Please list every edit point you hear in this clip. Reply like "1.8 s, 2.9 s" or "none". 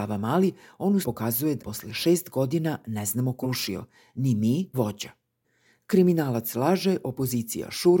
1.0 s, 1.6 s, 3.4 s, 4.7 s